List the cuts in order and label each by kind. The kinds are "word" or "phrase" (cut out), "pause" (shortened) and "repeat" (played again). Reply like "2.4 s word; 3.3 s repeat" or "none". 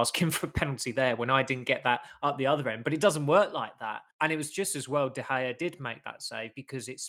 4.1 s pause